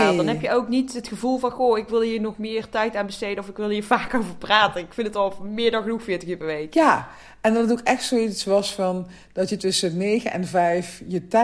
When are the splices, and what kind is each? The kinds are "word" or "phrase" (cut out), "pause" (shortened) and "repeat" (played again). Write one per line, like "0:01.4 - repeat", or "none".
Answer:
none

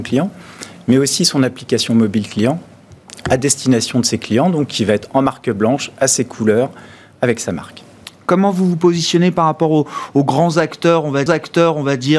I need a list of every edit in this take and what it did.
0:11.3 - repeat

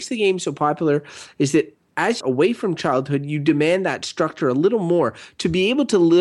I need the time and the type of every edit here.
0:02.2 - phrase

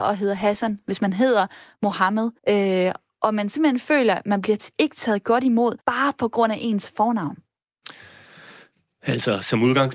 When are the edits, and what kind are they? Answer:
0:02.4 - pause
0:05.8 - pause

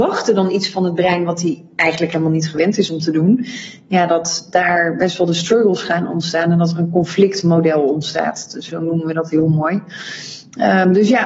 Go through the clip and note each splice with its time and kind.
0:08.7 - word

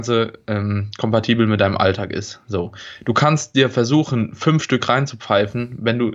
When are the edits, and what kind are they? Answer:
none

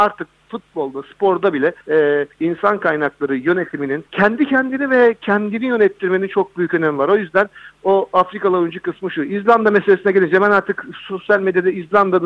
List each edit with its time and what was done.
0:01.8 - pause
0:02.3 - pause
0:04.1 - pause

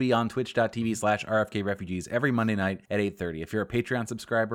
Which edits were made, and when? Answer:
0:02.8 - pause

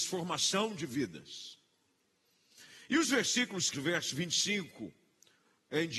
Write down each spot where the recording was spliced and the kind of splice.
0:03.7 - word

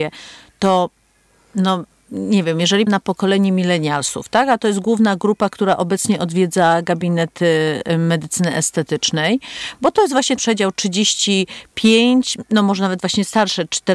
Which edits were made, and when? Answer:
0:02.9 - word
0:10.4 - word

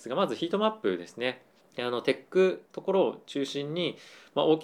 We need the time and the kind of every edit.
0:01.6 - pause
0:02.7 - pause

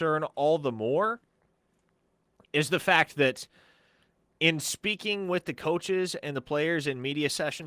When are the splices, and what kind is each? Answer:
none

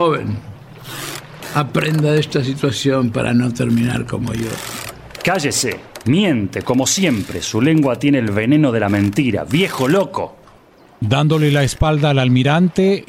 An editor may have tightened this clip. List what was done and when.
none

